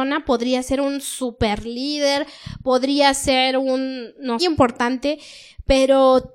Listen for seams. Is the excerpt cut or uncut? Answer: cut